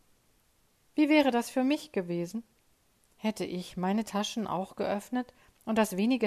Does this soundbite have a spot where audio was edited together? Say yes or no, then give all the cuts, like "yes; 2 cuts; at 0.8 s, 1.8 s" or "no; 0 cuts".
no; 0 cuts